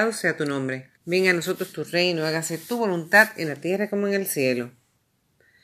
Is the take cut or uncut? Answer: cut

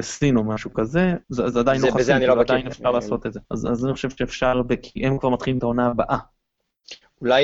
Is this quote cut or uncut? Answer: cut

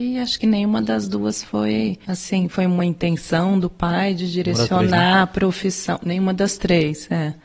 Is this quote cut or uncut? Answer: uncut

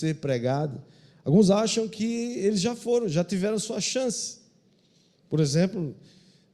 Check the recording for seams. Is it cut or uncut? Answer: uncut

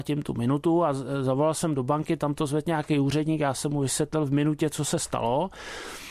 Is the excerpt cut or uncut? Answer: uncut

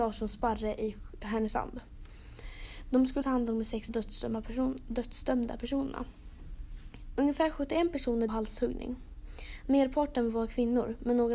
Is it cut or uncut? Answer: cut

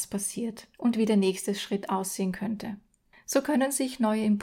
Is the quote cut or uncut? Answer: uncut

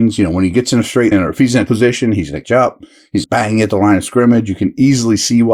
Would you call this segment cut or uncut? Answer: cut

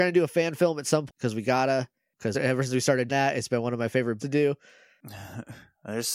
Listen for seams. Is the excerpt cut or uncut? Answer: cut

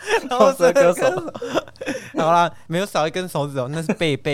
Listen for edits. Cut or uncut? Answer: cut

